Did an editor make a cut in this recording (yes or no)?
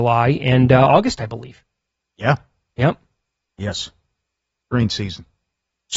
no